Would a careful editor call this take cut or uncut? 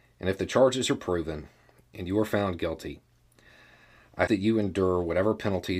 cut